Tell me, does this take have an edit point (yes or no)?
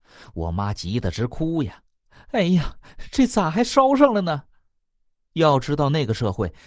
no